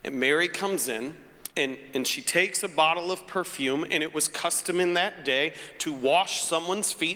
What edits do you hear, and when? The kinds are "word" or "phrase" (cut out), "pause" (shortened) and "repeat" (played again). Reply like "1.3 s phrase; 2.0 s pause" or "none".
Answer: 1.5 s pause